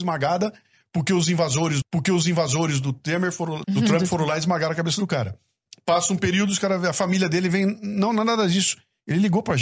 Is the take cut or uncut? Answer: cut